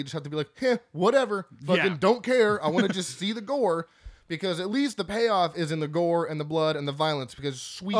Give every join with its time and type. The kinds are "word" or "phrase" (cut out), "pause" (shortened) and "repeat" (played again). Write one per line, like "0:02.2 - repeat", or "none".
none